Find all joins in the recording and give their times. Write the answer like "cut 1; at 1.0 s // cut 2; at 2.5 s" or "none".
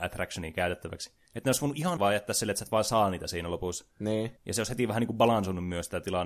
cut 1; at 2.0 s // cut 2; at 4.4 s